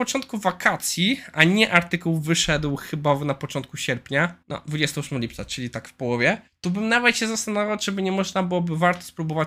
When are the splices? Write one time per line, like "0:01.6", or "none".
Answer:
0:04.4
0:06.5